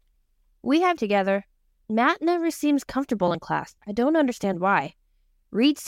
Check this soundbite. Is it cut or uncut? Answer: cut